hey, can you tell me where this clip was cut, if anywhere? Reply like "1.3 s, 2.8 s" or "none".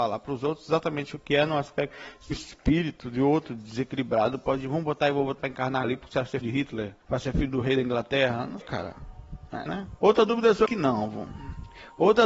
2.3 s, 5.4 s, 5.8 s, 6.4 s, 7.0 s, 8.6 s, 9.7 s, 10.0 s, 10.7 s